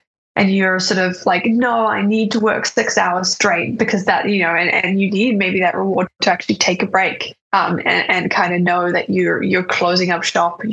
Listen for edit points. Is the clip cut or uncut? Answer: cut